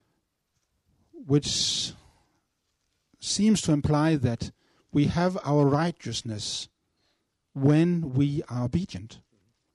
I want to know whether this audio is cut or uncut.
uncut